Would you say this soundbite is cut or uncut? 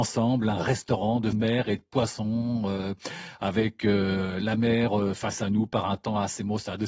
cut